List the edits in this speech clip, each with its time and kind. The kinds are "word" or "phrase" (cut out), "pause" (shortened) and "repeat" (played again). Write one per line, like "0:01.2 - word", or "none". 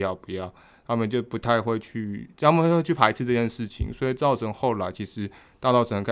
none